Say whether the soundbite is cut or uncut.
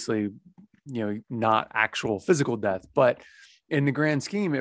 cut